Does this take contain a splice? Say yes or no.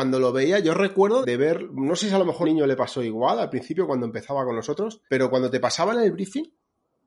yes